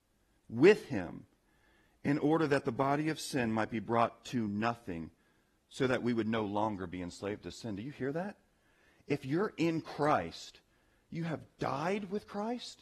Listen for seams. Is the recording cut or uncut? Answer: uncut